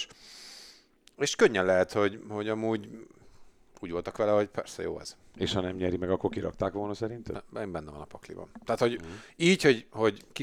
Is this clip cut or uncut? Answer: uncut